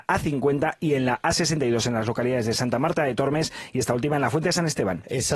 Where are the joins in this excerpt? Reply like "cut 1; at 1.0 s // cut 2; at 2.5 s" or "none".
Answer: none